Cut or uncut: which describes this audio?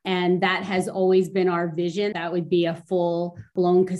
cut